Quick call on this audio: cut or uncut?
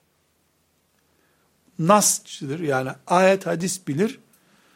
uncut